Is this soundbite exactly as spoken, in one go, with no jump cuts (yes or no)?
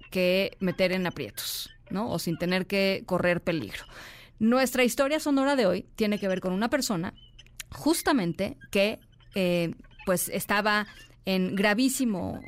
yes